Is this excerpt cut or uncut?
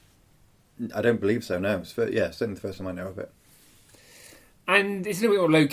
uncut